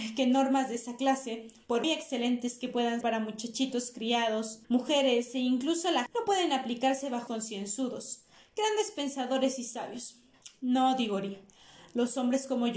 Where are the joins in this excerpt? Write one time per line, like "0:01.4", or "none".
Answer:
0:01.8
0:03.0
0:04.6
0:06.1
0:07.3